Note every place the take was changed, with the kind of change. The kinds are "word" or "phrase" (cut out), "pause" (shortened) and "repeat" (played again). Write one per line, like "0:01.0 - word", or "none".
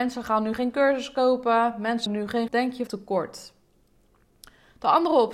0:02.1 - word
0:02.5 - phrase
0:02.9 - word